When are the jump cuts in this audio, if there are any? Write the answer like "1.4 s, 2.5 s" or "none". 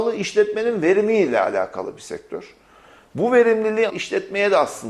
3.9 s